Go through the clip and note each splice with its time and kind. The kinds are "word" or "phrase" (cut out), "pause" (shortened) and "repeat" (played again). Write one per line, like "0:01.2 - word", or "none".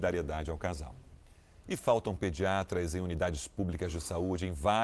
none